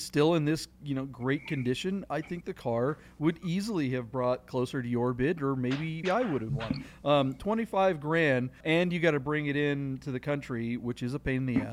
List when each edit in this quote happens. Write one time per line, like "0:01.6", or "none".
0:06.0
0:06.5
0:08.6